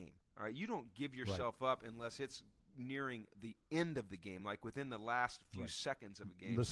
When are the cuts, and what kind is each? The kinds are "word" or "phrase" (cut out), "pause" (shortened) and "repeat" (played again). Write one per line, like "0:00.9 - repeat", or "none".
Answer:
none